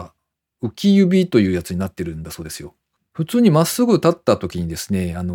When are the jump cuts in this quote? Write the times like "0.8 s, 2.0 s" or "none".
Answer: none